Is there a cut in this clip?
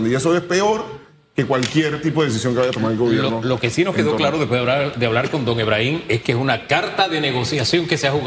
no; 0 cuts

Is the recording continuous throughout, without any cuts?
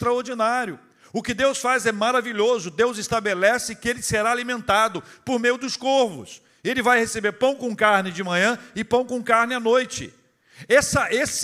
yes; 0 cuts

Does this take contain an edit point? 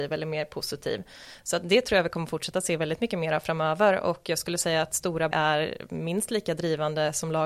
yes; 1 cut; at 5.3 s

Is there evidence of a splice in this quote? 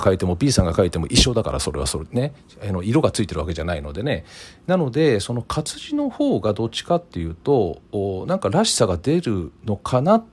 no; 0 cuts

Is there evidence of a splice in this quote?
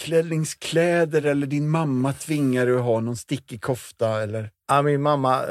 no; 0 cuts

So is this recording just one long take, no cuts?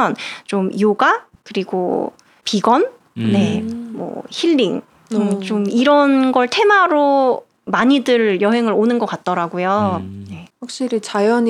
no; 1 cut; at 1.4 s

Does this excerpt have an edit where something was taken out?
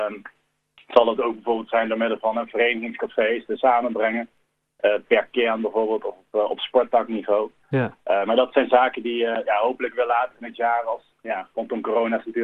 yes; 2 cuts; at 3.6 s, 11.1 s

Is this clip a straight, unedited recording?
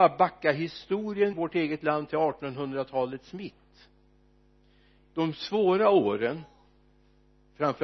no; 2 cuts; at 1.3 s, 5.0 s

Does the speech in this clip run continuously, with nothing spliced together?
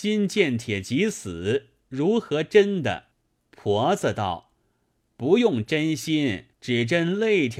no; 2 cuts; at 3.1 s, 6.5 s

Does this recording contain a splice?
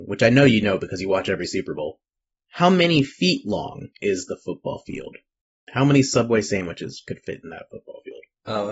yes; 1 cut; at 3.9 s

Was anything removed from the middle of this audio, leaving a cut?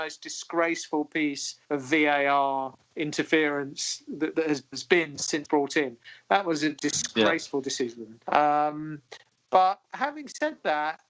yes; 6 cuts; at 1.6 s, 2.8 s, 4.3 s, 4.7 s, 5.5 s, 9.8 s

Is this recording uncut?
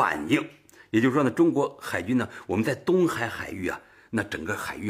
yes; 0 cuts

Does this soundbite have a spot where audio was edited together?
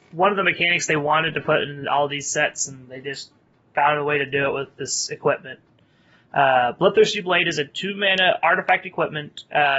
no; 0 cuts

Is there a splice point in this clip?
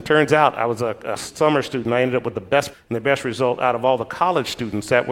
yes; 2 cuts; at 1.2 s, 2.7 s

